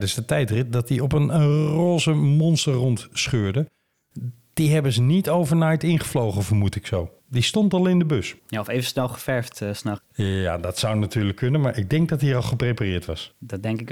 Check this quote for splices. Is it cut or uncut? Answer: cut